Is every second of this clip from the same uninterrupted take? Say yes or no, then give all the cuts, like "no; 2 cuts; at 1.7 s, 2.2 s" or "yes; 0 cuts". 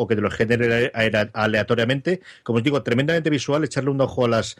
yes; 0 cuts